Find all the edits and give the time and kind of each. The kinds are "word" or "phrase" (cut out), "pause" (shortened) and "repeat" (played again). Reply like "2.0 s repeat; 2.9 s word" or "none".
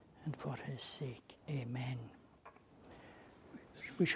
1.4 s pause